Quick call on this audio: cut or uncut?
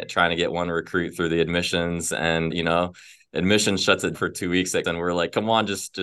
cut